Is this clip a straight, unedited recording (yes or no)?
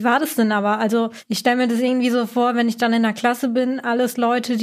yes